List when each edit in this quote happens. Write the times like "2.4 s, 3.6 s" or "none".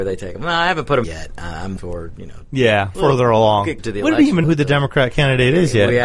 1.0 s, 1.8 s, 2.9 s, 3.8 s, 4.4 s